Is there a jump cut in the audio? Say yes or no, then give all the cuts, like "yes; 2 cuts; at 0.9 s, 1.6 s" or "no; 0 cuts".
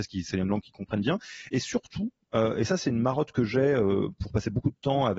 no; 0 cuts